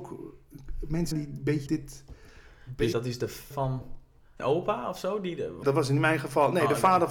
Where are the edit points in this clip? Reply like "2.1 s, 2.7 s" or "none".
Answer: 1.1 s, 1.7 s, 2.9 s, 3.5 s, 4.4 s, 5.6 s